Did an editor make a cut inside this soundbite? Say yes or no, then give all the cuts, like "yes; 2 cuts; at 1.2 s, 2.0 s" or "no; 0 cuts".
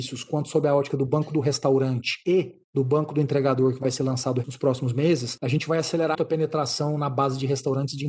yes; 1 cut; at 6.1 s